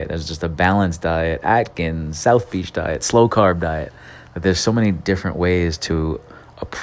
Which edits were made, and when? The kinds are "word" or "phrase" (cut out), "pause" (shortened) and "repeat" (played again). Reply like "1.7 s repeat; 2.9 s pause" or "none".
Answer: none